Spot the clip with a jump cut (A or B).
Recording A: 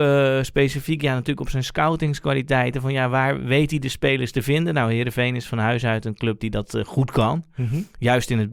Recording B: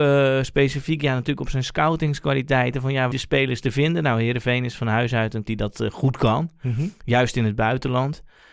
B